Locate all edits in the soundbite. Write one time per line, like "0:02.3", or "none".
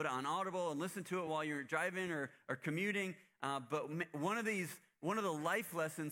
none